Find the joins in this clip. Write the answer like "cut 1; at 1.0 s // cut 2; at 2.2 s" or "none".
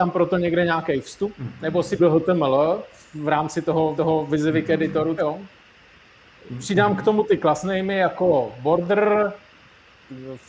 cut 1; at 2.0 s // cut 2; at 4.0 s // cut 3; at 5.2 s